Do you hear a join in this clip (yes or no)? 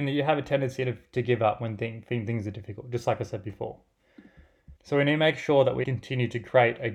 yes